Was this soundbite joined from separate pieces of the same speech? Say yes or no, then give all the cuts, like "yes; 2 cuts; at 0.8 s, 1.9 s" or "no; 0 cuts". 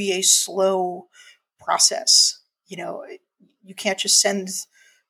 no; 0 cuts